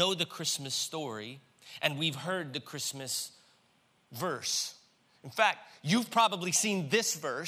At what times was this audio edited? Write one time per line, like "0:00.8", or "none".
none